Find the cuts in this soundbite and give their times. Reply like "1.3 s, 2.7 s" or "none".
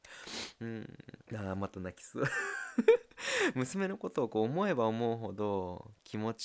1.2 s